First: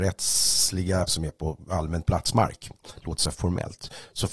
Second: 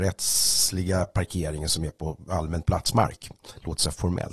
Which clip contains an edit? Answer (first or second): first